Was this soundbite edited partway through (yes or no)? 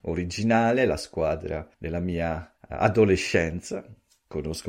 yes